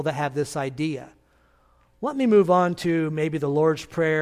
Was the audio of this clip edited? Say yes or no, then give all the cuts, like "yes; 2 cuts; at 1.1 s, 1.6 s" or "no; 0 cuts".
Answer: no; 0 cuts